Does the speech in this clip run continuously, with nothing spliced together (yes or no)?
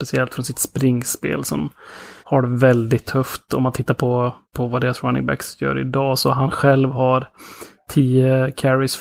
no